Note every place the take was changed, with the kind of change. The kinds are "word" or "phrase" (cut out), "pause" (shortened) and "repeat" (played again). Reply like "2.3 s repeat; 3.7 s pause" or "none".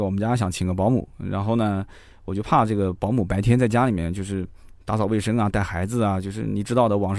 none